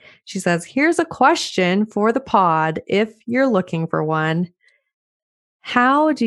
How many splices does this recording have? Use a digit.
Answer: 0